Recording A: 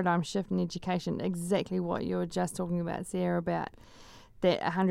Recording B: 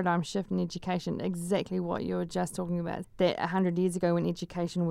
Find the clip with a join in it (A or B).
B